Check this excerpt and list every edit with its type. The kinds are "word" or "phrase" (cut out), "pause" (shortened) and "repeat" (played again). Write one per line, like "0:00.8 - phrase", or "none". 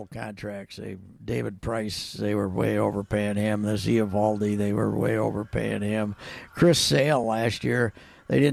none